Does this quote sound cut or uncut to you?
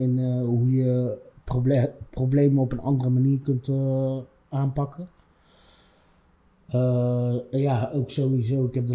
uncut